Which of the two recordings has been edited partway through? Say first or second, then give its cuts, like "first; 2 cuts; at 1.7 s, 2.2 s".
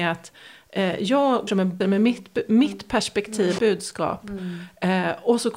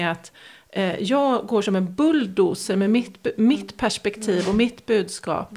first; 3 cuts; at 1.5 s, 1.8 s, 3.6 s